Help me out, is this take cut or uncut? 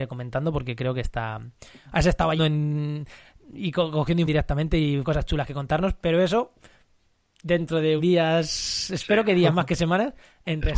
cut